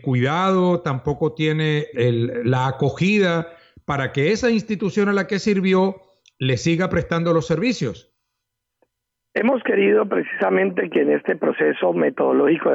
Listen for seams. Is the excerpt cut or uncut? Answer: cut